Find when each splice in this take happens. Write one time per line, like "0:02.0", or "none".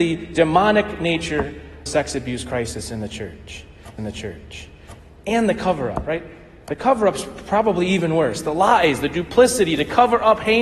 0:01.9
0:04.0